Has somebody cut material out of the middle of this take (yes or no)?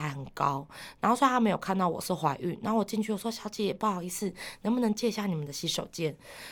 no